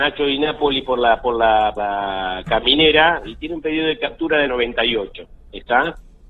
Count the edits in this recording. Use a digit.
2